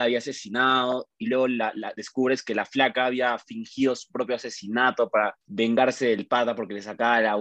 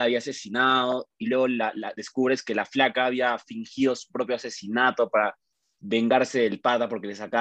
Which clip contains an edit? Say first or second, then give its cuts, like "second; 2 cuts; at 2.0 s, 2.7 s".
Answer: first; 1 cut; at 5.4 s